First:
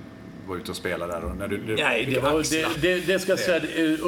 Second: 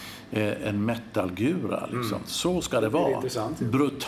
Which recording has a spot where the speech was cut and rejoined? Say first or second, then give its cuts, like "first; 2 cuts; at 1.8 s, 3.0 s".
first; 1 cut; at 2.7 s